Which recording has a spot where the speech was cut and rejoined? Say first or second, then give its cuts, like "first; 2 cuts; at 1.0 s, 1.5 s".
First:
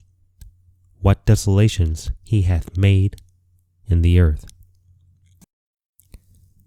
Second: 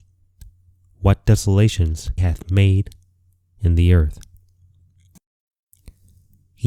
second; 1 cut; at 2.2 s